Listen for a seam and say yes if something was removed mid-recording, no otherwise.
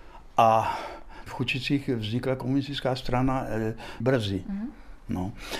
yes